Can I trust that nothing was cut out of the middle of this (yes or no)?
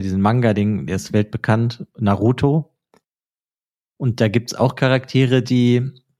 yes